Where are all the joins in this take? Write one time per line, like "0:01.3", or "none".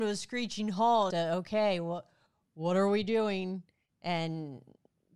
0:01.1